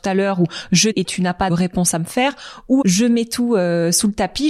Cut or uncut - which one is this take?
cut